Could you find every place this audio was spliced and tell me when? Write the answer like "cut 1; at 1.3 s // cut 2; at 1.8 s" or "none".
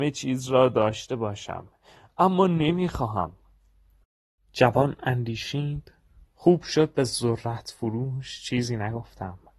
none